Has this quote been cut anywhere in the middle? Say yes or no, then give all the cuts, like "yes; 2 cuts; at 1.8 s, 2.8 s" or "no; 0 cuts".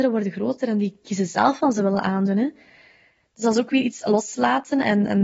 no; 0 cuts